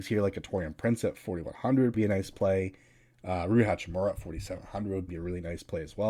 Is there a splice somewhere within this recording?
yes; 2 cuts; at 1.9 s, 5.1 s

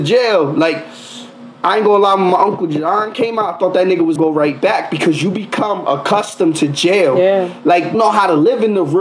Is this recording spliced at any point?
yes; 2 cuts; at 4.2 s, 7.9 s

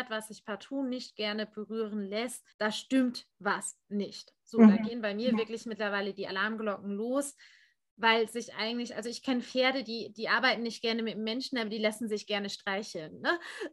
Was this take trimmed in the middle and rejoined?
yes; 1 cut; at 2.5 s

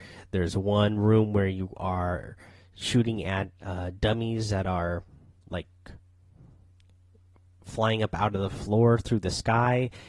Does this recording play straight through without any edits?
yes; 0 cuts

